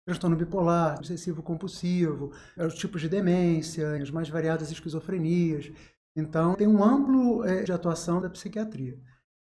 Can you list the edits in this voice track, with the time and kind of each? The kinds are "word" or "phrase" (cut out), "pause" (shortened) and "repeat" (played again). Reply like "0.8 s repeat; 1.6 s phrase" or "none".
1.0 s word; 2.6 s word; 4.0 s word; 6.5 s word; 7.7 s word; 8.2 s word